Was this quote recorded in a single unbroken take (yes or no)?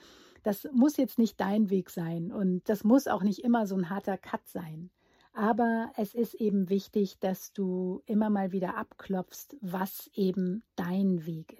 yes